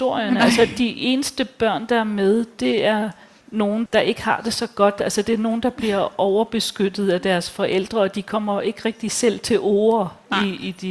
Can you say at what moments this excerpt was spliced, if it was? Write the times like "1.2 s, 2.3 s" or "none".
none